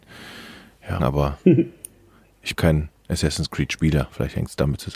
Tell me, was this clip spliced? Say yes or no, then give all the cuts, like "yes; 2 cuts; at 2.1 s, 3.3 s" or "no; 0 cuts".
yes; 2 cuts; at 1.0 s, 2.5 s